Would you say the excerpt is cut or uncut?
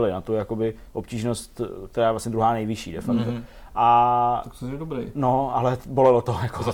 uncut